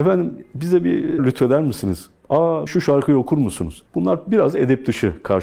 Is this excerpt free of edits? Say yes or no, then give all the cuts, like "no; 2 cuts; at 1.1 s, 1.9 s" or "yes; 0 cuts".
no; 3 cuts; at 1.2 s, 2.7 s, 3.9 s